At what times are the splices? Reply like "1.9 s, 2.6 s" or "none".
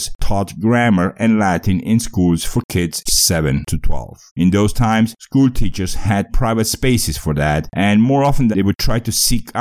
3.1 s, 4.3 s, 6.3 s, 8.5 s